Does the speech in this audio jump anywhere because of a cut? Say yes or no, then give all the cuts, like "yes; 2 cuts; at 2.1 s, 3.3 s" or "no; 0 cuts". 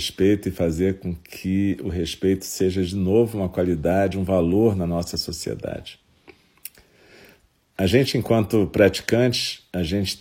no; 0 cuts